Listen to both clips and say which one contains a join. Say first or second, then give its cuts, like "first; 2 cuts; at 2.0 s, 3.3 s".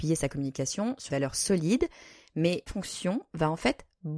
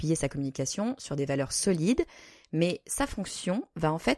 first; 2 cuts; at 1.1 s, 2.7 s